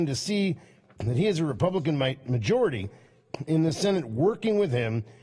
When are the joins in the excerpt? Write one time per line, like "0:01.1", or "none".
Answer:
none